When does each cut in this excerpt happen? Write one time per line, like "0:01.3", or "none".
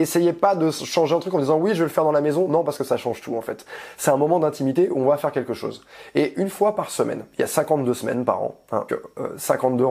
0:08.9